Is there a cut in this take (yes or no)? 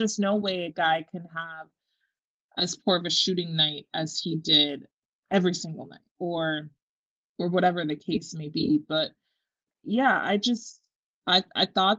no